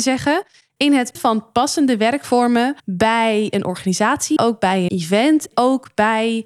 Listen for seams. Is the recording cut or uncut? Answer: cut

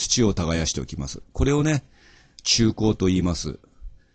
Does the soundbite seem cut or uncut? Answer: uncut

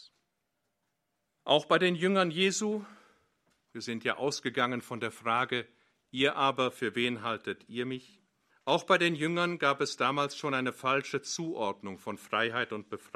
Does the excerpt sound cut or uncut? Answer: cut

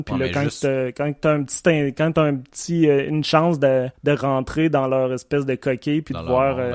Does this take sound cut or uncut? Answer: cut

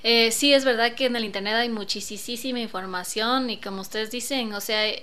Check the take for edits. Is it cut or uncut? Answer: uncut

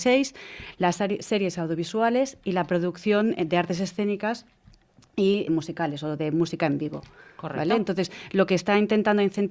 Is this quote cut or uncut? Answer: cut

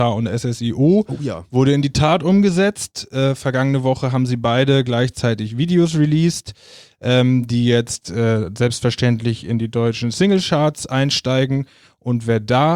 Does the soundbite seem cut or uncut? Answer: uncut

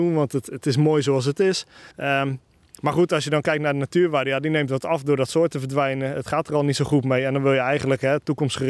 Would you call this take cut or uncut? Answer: cut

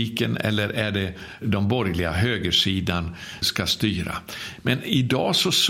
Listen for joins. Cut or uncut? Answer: cut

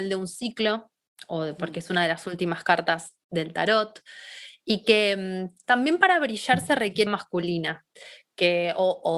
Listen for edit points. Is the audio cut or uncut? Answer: cut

